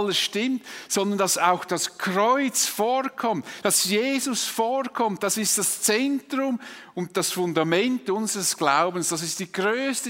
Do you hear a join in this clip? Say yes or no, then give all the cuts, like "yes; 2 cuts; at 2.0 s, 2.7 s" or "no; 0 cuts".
no; 0 cuts